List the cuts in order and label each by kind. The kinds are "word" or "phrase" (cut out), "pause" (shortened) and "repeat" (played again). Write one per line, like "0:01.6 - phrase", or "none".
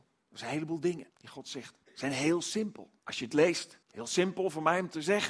0:01.1 - pause
0:01.8 - pause
0:03.0 - pause
0:03.8 - pause